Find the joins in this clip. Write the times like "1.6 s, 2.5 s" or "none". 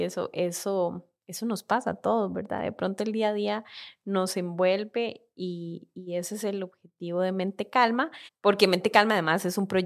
1.2 s, 8.3 s